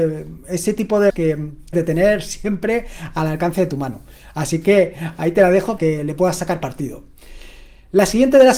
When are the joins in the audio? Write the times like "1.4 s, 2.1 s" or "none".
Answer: 1.1 s, 1.7 s, 5.8 s